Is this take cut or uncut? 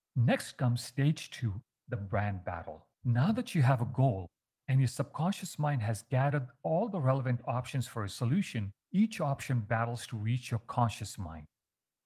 cut